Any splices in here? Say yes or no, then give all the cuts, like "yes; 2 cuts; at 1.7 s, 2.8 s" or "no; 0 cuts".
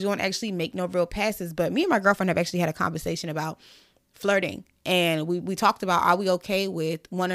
no; 0 cuts